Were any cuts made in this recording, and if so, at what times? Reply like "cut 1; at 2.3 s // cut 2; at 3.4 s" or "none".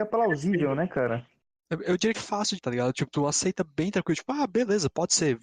cut 1; at 2.1 s // cut 2; at 2.6 s